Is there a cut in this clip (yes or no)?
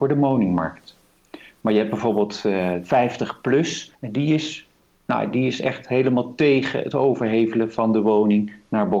yes